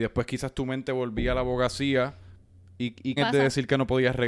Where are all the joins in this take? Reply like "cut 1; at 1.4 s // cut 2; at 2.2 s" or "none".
cut 1; at 3.2 s